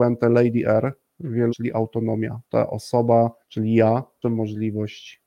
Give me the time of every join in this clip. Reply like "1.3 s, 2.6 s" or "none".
1.5 s, 2.4 s, 3.4 s, 4.2 s